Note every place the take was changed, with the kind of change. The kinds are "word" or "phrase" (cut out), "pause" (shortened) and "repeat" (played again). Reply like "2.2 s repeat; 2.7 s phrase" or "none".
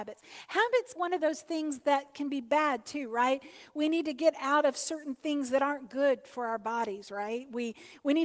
1.0 s phrase